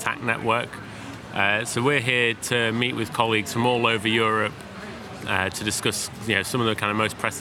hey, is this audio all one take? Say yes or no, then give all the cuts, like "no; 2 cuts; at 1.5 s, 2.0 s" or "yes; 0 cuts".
yes; 0 cuts